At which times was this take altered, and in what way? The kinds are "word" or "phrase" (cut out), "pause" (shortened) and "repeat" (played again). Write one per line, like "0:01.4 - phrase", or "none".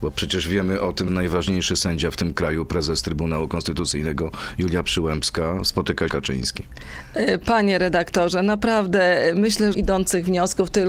0:01.1 - word
0:06.1 - phrase
0:09.7 - phrase